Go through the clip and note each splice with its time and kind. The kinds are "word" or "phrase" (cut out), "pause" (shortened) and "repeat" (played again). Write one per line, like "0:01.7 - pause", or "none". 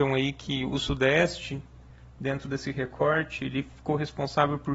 none